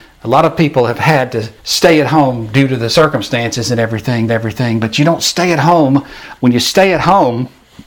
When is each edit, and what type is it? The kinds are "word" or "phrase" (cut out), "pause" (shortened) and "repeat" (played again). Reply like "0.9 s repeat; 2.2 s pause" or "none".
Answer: 1.6 s pause; 4.3 s repeat; 6.4 s phrase